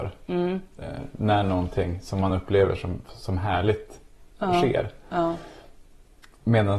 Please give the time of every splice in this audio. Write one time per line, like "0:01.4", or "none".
none